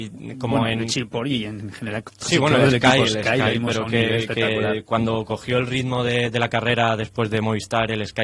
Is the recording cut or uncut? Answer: uncut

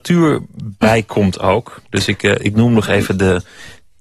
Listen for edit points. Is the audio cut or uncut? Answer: uncut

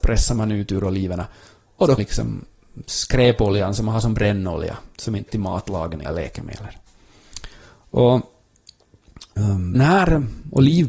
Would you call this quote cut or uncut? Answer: cut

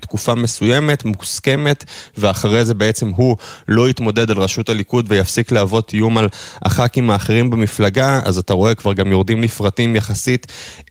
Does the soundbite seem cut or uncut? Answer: uncut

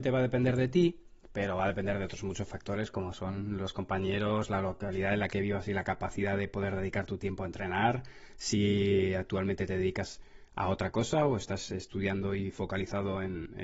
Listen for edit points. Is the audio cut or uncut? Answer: uncut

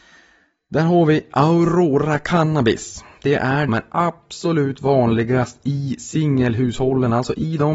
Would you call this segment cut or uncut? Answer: cut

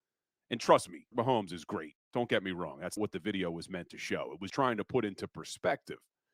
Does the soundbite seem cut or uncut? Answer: cut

